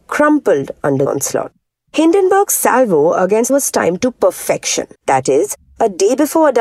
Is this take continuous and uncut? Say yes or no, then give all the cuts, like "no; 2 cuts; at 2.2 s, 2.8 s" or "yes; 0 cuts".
no; 4 cuts; at 1.1 s, 1.7 s, 3.5 s, 4.9 s